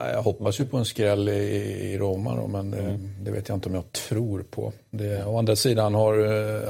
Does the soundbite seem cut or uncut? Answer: uncut